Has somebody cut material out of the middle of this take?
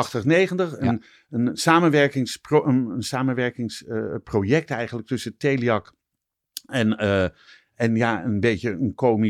no; 0 cuts

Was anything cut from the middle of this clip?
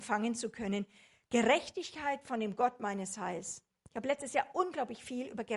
no; 0 cuts

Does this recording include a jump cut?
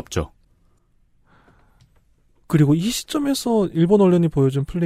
no; 0 cuts

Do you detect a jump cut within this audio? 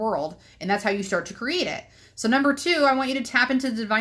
no; 0 cuts

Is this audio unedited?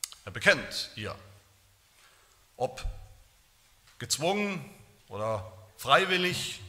yes; 0 cuts

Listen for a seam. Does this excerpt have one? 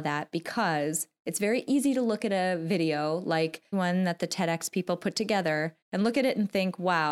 yes; 2 cuts; at 3.7 s, 5.8 s

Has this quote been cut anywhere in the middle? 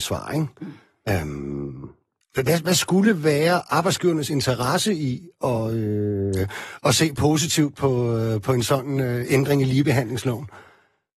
yes; 1 cut; at 2.2 s

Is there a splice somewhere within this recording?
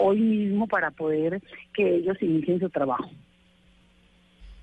no; 0 cuts

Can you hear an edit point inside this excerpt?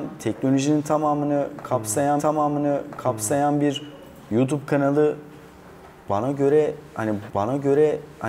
yes; 2 cuts; at 2.2 s, 7.3 s

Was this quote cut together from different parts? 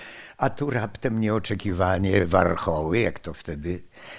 no; 0 cuts

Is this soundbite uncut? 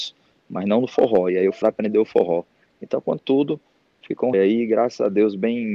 no; 3 cuts; at 1.6 s, 3.2 s, 4.3 s

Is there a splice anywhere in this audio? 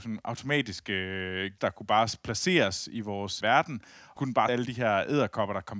yes; 4 cuts; at 1.6 s, 3.4 s, 4.2 s, 4.5 s

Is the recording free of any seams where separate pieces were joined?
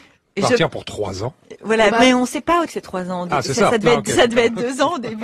no; 2 cuts; at 1.9 s, 2.7 s

